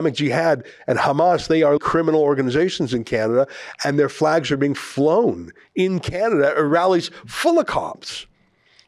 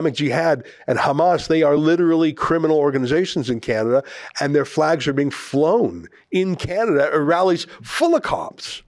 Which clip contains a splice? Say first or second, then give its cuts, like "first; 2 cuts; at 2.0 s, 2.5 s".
first; 1 cut; at 1.8 s